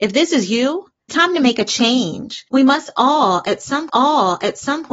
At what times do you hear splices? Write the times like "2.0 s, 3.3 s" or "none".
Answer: 1.1 s, 2.5 s, 3.9 s